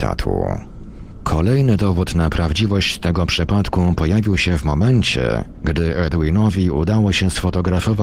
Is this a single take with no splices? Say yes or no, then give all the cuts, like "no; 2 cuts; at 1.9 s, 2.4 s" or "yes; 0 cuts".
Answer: yes; 0 cuts